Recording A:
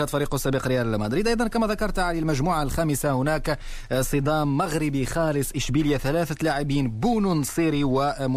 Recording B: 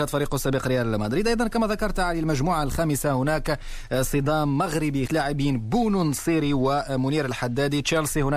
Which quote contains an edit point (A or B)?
B